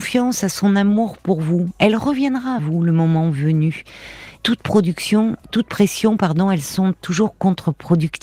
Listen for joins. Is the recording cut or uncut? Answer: cut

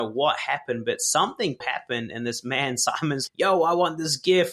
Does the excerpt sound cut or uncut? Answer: cut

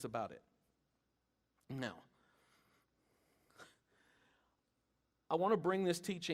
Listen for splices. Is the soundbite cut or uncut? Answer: uncut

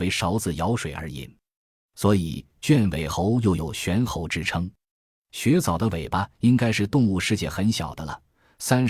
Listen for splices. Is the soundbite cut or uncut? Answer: uncut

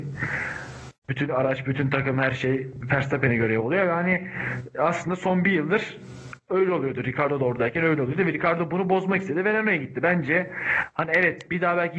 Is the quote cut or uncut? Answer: uncut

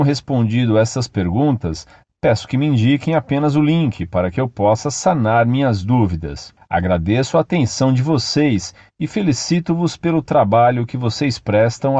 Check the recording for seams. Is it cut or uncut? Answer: uncut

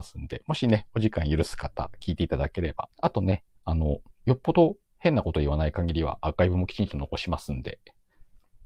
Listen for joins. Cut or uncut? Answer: cut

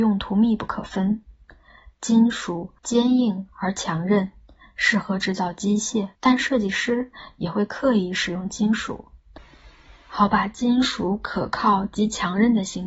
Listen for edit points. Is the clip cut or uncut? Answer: cut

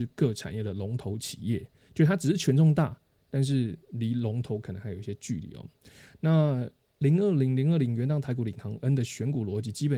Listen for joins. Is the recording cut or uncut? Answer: uncut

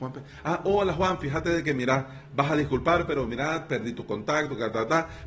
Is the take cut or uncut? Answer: uncut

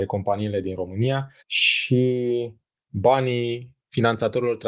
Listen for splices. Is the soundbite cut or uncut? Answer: cut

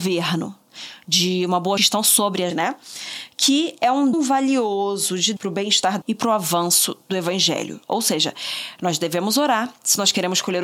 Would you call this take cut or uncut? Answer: cut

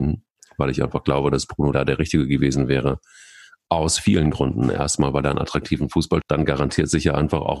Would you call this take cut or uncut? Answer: cut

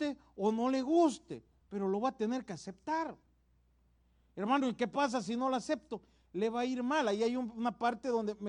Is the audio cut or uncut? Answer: uncut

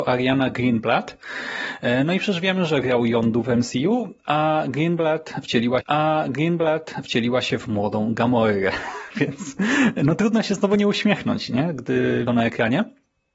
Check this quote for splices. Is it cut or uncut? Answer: cut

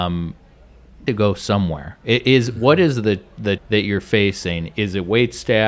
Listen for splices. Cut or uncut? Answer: cut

